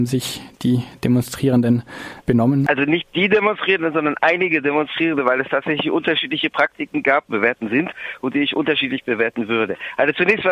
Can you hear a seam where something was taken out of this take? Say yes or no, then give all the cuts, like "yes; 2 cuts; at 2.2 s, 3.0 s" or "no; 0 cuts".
yes; 1 cut; at 7.3 s